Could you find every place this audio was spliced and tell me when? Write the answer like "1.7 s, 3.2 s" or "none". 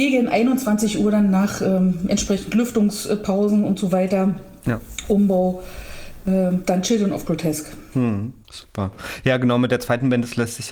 8.4 s